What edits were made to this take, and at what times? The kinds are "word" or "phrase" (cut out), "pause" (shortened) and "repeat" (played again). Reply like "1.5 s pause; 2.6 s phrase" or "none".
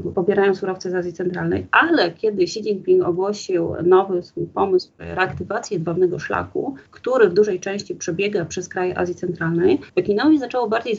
6.9 s pause; 9.9 s pause